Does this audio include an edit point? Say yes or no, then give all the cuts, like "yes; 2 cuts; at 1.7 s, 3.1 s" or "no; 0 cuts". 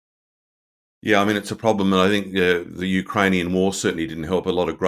no; 0 cuts